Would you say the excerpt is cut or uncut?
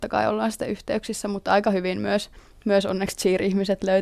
uncut